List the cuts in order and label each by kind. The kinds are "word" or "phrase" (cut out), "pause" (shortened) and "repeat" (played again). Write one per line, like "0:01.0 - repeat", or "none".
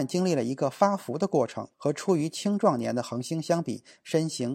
0:01.7 - pause